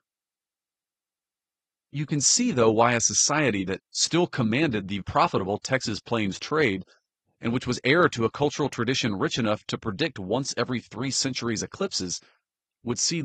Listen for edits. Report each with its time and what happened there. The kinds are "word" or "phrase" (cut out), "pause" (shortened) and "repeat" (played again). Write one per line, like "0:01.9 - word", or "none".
0:03.8 - pause
0:05.0 - word